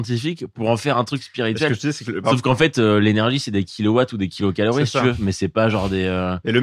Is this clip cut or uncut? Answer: uncut